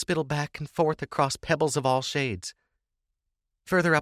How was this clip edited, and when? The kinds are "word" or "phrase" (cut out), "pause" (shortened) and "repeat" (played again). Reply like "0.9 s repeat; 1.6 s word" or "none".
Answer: none